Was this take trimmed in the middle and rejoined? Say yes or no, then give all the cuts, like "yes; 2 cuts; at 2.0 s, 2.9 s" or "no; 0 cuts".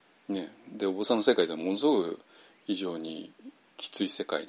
no; 0 cuts